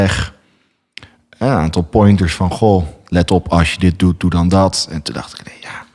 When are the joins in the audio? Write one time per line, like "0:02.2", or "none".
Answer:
none